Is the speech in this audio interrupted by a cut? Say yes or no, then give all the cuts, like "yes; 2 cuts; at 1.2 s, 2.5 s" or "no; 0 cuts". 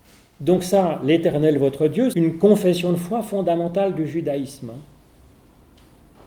yes; 1 cut; at 2.1 s